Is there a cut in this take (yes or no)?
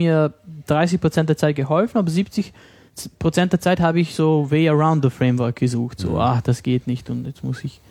no